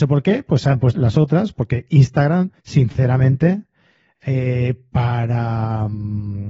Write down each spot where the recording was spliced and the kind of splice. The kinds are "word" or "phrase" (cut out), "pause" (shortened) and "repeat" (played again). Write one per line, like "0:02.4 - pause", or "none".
0:00.9 - phrase
0:02.6 - pause